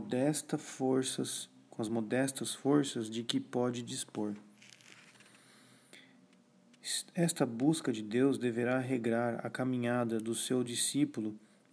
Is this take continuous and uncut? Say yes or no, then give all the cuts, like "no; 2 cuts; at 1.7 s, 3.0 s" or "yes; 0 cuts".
yes; 0 cuts